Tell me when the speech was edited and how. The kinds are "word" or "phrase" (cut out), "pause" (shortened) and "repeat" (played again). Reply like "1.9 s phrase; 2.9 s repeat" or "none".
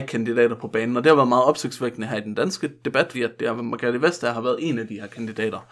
3.1 s word

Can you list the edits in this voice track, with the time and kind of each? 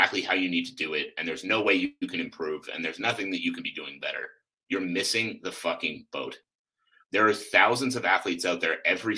none

